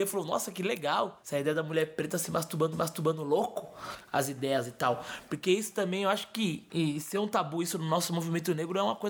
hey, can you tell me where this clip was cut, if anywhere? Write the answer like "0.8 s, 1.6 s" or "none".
2.7 s